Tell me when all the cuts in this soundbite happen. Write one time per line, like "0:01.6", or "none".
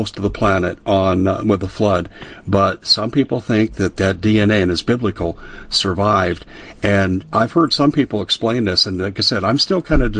none